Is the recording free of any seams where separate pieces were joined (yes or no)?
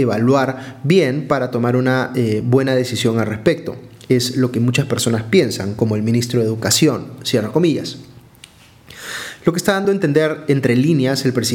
yes